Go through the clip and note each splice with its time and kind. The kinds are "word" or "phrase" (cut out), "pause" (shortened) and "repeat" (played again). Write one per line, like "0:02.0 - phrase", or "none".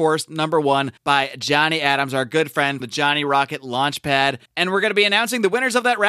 0:01.0 - pause
0:02.8 - word
0:04.4 - pause